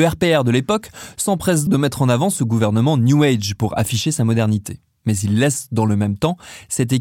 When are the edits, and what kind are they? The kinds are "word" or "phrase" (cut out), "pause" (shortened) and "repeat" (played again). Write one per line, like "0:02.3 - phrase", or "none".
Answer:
0:01.7 - word